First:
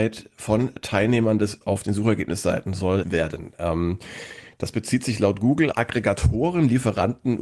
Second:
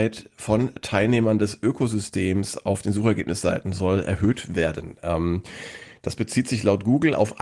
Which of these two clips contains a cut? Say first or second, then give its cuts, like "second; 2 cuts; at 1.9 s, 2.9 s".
first; 3 cuts; at 1.6 s, 3.0 s, 5.7 s